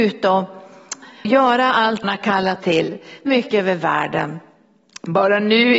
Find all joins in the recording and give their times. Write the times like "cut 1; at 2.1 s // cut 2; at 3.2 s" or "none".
cut 1; at 1.2 s // cut 2; at 2.0 s // cut 3; at 2.6 s // cut 4; at 3.3 s